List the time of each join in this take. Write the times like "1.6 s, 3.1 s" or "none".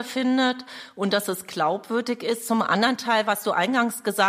none

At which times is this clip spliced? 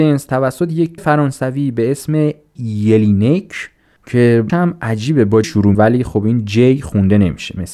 1.0 s, 2.6 s, 4.5 s, 5.4 s, 5.7 s

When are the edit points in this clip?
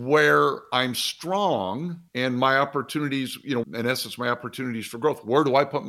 2.1 s, 3.6 s

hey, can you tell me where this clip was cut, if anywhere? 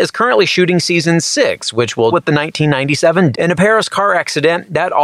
2.1 s, 3.3 s

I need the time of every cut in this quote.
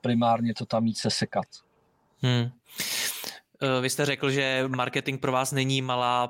none

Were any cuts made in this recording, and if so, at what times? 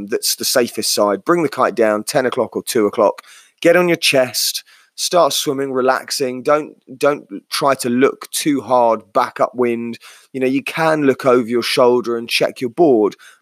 none

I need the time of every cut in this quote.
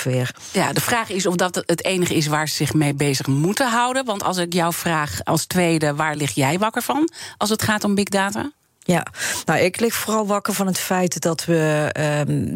none

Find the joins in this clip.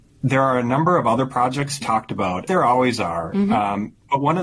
1.8 s, 2.5 s

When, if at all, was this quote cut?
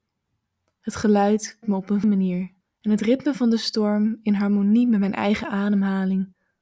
1.6 s, 2.0 s, 2.6 s

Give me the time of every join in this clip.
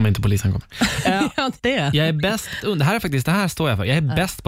1.6 s, 2.6 s

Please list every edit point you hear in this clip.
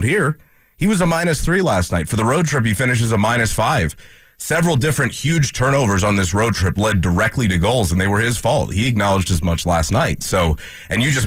none

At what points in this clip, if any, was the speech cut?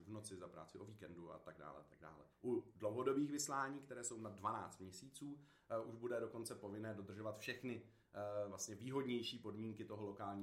2.3 s

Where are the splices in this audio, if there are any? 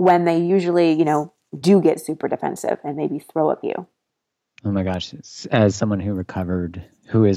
3.6 s

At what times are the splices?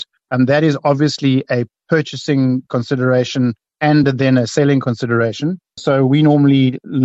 none

